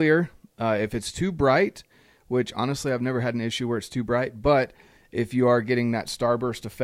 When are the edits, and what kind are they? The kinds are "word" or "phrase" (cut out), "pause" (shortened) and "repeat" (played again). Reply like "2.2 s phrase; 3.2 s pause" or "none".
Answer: none

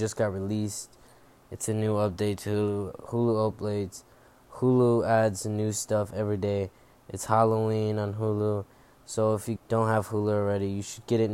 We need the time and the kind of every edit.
9.6 s word

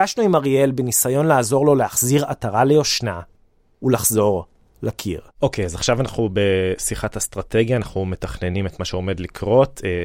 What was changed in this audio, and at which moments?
5.3 s pause

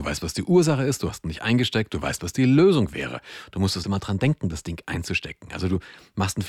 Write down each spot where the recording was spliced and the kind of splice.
3.8 s word

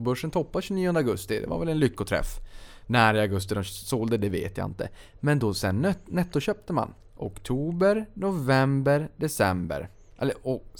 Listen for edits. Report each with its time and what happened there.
7.0 s pause

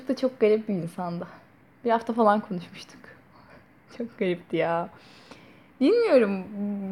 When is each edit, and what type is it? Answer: none

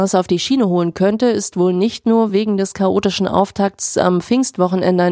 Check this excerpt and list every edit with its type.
none

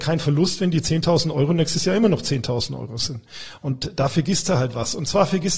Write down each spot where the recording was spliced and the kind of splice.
none

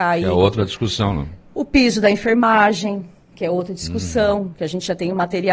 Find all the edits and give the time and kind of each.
none

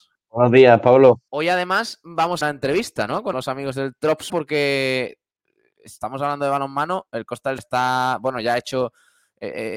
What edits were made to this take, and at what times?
1.3 s pause; 2.4 s phrase; 3.3 s phrase; 4.3 s word; 7.6 s phrase

